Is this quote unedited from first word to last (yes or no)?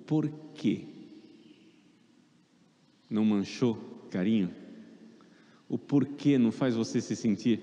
no